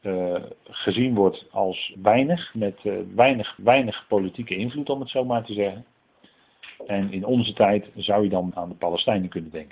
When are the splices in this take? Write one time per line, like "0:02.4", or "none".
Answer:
0:02.0
0:03.6
0:08.5